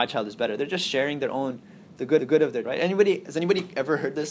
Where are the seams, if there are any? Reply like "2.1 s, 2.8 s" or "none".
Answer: 2.2 s, 2.6 s